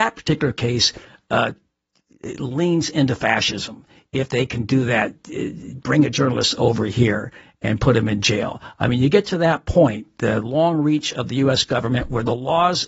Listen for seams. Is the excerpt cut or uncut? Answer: uncut